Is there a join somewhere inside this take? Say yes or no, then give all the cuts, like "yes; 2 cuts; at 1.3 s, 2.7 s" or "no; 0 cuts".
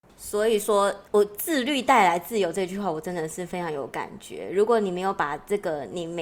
yes; 1 cut; at 1.1 s